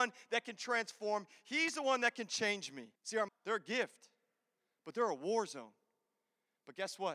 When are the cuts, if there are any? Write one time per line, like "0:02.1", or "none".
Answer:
0:03.0
0:03.3

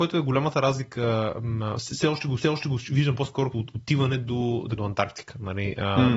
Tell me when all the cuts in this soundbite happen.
0:02.4
0:03.5
0:04.8

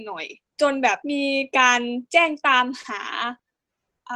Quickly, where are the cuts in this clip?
0:01.0
0:02.1

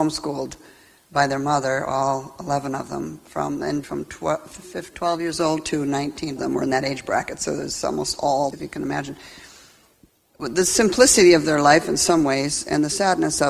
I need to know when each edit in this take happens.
0:03.8
0:06.4
0:08.5

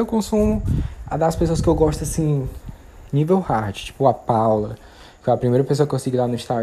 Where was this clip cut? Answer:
none

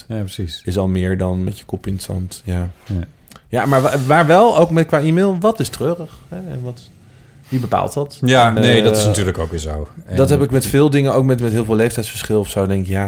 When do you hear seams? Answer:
0:08.6
0:11.4

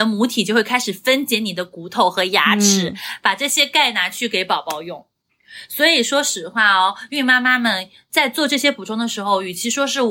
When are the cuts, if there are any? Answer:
none

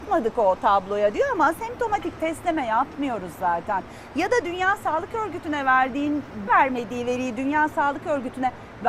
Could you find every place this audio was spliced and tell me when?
0:06.5

